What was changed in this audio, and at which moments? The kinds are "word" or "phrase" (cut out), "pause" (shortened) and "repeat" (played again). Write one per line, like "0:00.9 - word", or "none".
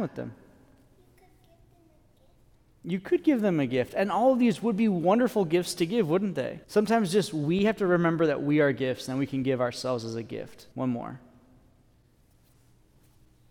0:06.6 - pause
0:10.7 - pause